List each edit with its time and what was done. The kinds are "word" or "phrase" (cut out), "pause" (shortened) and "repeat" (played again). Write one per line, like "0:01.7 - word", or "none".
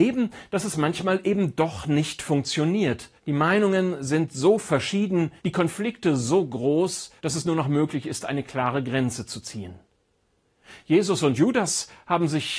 0:03.2 - pause
0:05.4 - pause
0:07.2 - pause